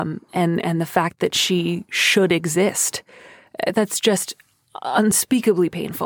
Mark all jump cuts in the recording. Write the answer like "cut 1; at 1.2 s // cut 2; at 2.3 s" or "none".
none